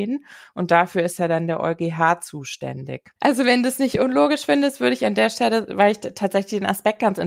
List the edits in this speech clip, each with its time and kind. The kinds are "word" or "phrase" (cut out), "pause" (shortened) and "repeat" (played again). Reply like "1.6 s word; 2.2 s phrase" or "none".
3.2 s pause